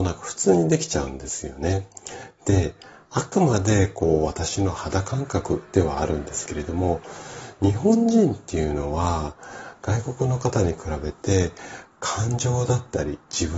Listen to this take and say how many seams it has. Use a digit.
0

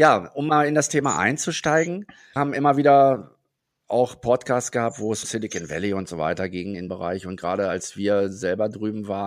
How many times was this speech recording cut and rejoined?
3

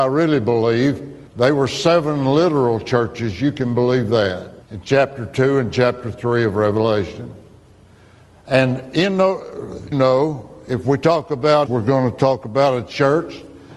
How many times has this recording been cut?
4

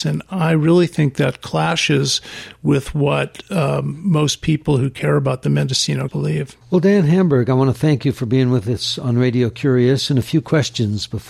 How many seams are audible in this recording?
2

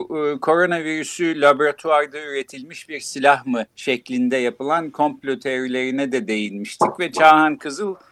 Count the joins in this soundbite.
1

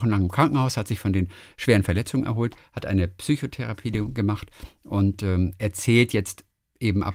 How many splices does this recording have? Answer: 0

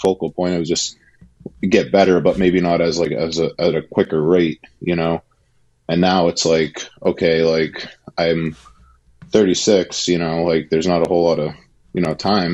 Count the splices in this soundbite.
0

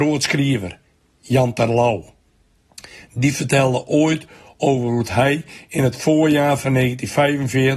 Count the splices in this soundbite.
0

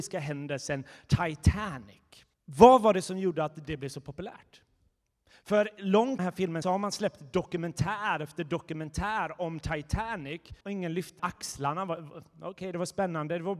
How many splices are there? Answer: 5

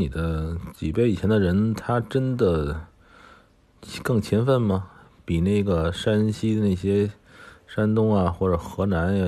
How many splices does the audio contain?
0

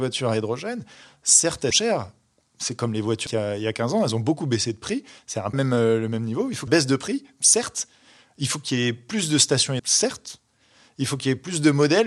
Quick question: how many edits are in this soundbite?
5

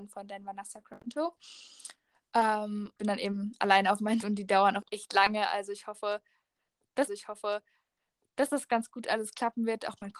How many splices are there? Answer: 3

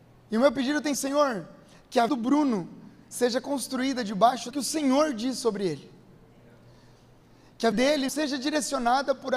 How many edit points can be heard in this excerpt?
5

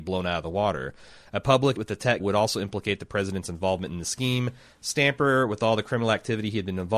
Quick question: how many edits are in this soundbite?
2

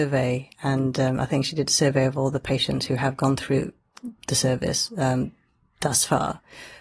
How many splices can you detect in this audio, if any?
0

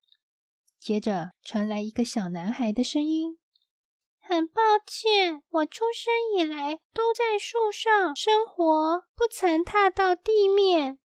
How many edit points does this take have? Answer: 4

